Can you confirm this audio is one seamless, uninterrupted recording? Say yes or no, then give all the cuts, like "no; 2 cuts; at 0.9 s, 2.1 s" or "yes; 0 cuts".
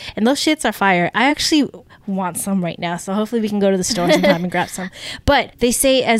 yes; 0 cuts